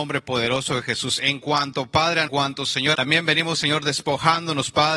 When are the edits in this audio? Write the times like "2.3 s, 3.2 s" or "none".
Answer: 2.3 s, 2.9 s